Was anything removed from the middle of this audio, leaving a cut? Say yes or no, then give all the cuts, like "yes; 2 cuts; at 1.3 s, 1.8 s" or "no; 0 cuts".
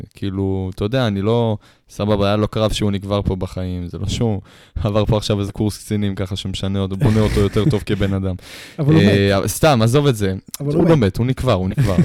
no; 0 cuts